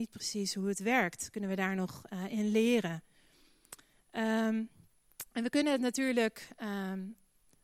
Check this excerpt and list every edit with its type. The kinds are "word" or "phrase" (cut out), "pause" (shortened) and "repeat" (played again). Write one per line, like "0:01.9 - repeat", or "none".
none